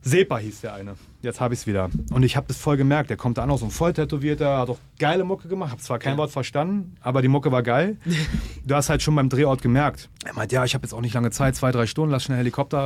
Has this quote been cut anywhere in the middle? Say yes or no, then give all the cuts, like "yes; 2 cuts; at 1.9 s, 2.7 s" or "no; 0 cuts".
yes; 1 cut; at 10.1 s